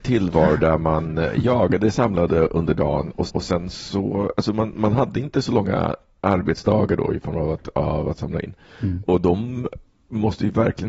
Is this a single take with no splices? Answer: no; 1 cut; at 3.3 s

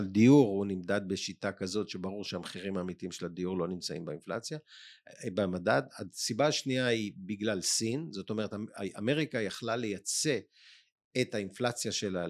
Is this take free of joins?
yes; 0 cuts

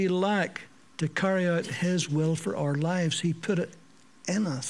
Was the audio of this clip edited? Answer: no; 0 cuts

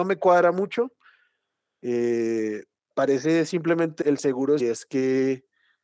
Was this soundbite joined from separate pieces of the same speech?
yes; 3 cuts; at 2.9 s, 4.0 s, 4.6 s

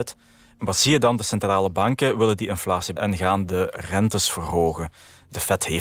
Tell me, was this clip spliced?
yes; 1 cut; at 3.0 s

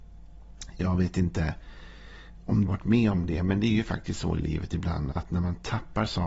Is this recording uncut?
no; 2 cuts; at 2.7 s, 5.1 s

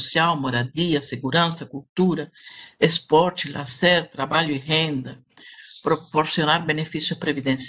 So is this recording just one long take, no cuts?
yes; 0 cuts

